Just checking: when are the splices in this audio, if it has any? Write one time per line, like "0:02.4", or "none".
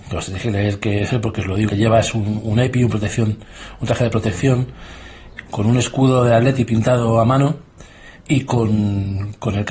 0:01.7
0:05.5
0:08.2